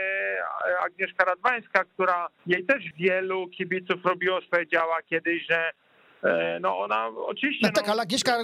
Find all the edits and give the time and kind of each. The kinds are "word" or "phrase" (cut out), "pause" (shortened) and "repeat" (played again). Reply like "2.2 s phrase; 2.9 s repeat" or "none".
2.4 s pause; 2.9 s word; 4.5 s phrase

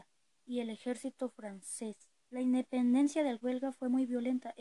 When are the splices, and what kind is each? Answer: 2.2 s pause; 3.4 s word

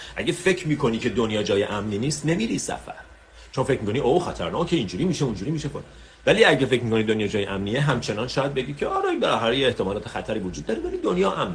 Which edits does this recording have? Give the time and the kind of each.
none

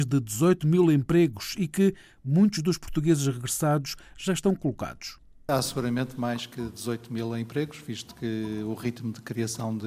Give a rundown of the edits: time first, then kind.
none

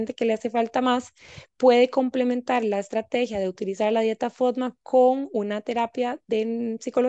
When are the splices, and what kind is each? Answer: none

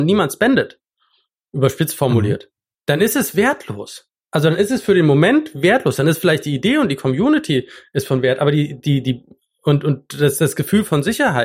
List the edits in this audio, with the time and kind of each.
none

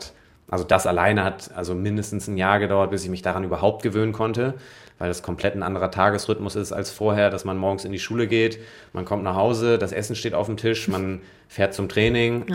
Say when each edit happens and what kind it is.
none

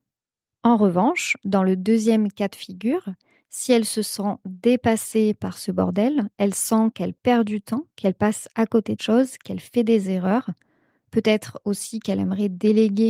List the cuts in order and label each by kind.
9.0 s word

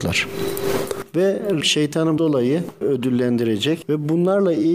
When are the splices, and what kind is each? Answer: 1.6 s word; 2.2 s word; 2.8 s word

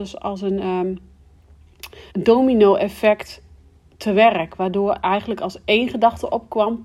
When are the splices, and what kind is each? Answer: 2.1 s pause

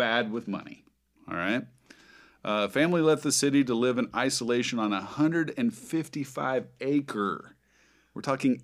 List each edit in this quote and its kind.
none

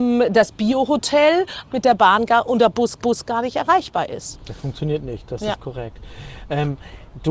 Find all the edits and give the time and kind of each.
1.7 s word; 3.0 s repeat

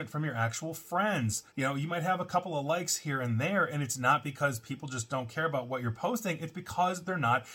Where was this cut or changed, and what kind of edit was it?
1.5 s pause

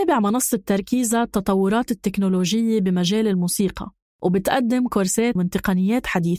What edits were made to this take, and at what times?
4.0 s pause; 5.4 s phrase

